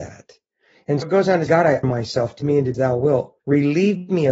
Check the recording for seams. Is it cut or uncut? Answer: cut